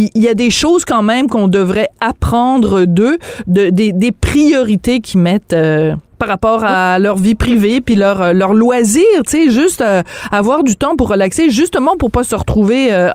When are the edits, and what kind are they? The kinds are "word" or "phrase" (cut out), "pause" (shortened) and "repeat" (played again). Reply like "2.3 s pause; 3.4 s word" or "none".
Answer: 6.1 s pause